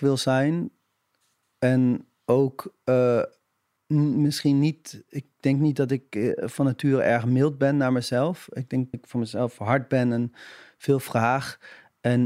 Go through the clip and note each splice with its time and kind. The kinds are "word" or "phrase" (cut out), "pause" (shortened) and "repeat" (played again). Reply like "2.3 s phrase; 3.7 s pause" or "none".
3.8 s word; 8.9 s word